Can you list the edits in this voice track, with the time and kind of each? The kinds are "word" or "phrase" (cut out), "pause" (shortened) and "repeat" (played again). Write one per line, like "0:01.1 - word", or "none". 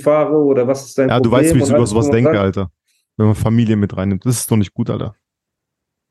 none